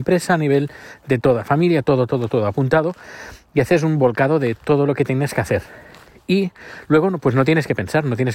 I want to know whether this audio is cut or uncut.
uncut